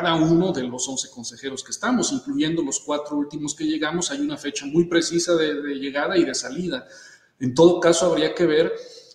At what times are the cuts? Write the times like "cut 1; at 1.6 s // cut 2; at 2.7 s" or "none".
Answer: none